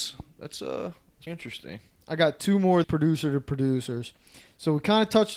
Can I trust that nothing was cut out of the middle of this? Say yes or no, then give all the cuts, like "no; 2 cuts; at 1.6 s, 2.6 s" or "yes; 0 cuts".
no; 2 cuts; at 1.3 s, 2.8 s